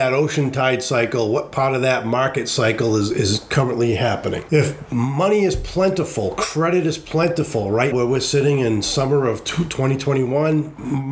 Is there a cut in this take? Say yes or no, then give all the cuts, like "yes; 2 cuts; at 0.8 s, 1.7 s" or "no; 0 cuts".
yes; 1 cut; at 7.9 s